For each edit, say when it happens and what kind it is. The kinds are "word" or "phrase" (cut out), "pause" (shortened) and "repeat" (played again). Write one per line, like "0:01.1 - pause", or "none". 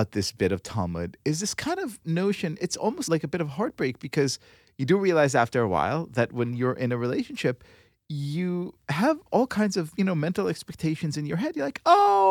none

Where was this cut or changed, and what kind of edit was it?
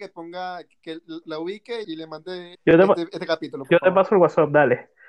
0:01.2 - word
0:01.8 - word
0:02.5 - word

